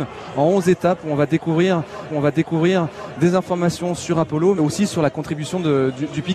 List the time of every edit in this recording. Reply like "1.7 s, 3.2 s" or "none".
2.1 s, 4.6 s